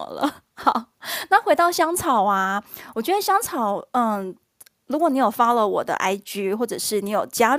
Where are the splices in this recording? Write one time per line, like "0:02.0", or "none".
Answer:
none